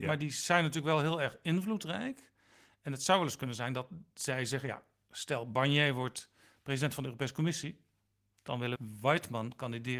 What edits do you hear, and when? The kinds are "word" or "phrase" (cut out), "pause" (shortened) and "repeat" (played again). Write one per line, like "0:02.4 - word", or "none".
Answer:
0:08.8 - word